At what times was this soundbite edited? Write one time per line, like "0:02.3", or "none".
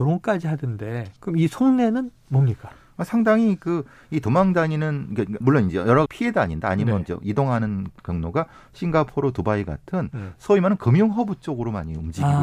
0:01.2
0:05.4
0:06.1